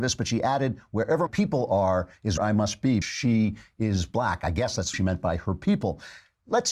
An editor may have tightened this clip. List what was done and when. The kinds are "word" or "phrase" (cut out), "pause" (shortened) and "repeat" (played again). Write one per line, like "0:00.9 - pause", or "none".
0:01.3 - word
0:02.4 - word
0:03.0 - word
0:04.9 - word